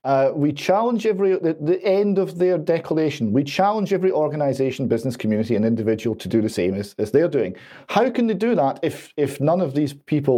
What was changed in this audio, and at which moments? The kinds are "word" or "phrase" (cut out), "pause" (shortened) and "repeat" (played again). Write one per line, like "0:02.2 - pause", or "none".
none